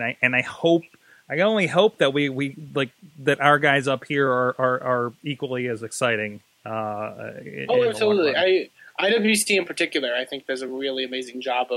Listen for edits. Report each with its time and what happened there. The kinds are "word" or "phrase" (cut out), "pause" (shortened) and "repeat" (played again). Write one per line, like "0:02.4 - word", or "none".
none